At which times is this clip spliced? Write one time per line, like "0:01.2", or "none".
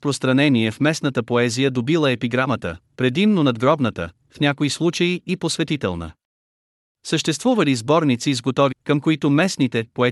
0:08.7